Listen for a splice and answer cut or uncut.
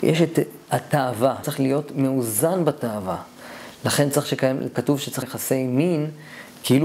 cut